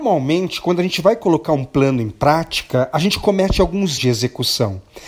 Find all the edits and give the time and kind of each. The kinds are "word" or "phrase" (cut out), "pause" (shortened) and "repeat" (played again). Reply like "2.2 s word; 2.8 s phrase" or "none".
4.0 s word